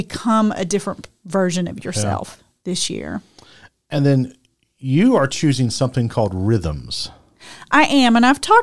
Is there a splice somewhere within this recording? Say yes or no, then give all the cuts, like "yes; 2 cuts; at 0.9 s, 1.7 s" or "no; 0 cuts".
no; 0 cuts